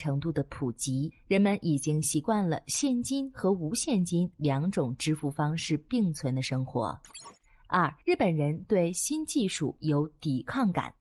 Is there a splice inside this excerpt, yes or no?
yes